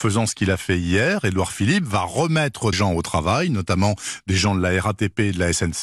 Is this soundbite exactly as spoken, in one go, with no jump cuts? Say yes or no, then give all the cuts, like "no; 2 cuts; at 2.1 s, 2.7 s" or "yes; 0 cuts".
no; 1 cut; at 2.7 s